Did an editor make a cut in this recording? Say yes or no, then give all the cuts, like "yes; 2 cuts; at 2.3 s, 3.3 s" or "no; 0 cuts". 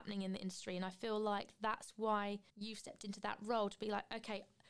yes; 1 cut; at 2.5 s